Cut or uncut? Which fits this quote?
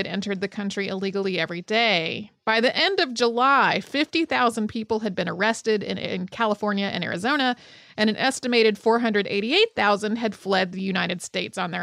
uncut